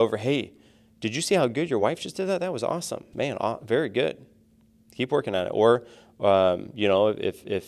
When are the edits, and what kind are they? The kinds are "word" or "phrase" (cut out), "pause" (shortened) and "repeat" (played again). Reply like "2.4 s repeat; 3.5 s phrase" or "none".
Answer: none